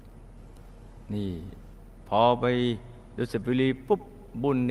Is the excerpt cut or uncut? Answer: uncut